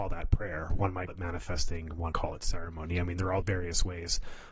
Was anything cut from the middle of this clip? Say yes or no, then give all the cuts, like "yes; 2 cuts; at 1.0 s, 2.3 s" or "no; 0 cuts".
yes; 3 cuts; at 1.1 s, 2.1 s, 3.4 s